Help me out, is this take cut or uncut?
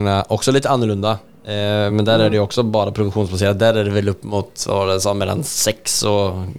uncut